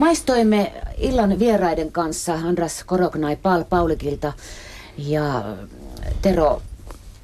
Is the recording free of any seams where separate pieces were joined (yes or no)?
yes